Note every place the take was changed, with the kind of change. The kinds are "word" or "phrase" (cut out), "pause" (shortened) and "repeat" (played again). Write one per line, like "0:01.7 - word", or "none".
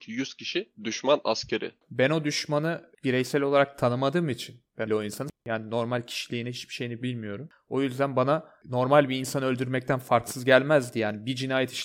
0:04.9 - phrase

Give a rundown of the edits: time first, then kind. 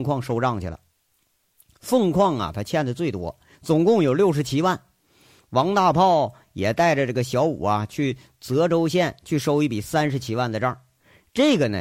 none

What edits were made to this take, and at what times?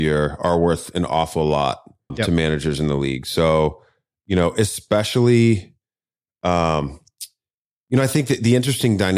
0:02.1 - word

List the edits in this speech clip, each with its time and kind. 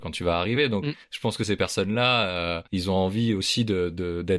0:01.0 - pause
0:02.7 - pause

